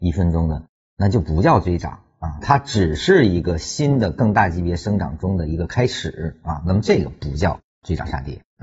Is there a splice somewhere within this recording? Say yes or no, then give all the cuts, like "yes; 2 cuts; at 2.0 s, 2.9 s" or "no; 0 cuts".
no; 0 cuts